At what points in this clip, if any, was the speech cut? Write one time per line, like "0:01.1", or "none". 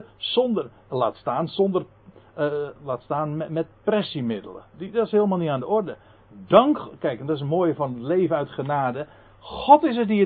none